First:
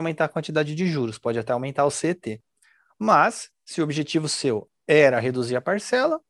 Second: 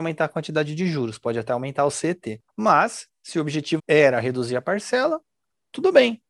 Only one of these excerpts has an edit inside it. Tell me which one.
second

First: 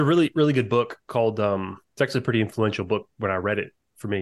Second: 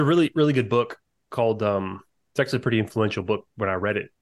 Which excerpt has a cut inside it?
first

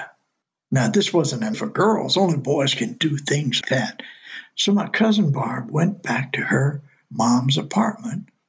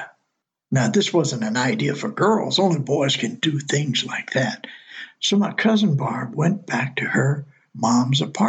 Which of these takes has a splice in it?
first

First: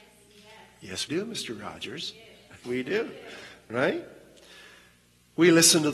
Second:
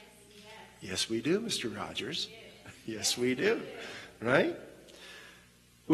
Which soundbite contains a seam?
first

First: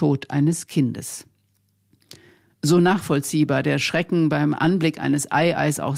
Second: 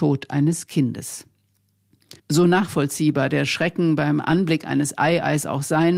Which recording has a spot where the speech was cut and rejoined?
second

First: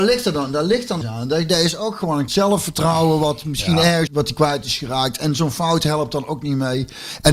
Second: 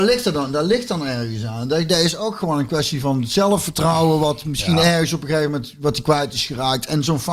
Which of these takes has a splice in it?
first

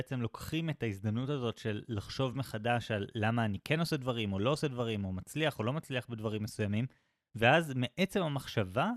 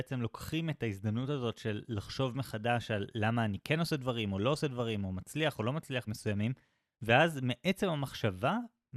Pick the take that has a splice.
second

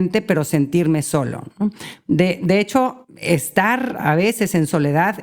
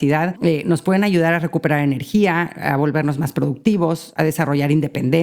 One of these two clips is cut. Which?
first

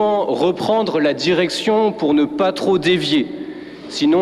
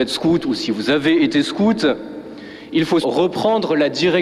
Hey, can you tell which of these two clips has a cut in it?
second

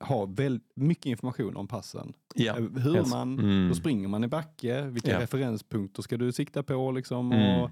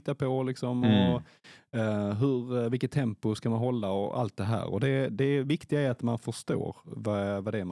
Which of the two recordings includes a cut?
first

